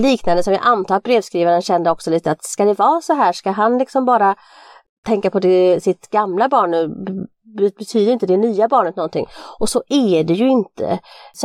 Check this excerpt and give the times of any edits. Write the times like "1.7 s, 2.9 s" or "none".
none